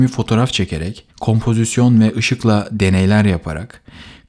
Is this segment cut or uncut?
cut